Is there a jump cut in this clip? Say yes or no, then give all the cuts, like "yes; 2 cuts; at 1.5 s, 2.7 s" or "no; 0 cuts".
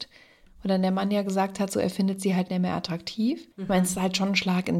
yes; 1 cut; at 3.5 s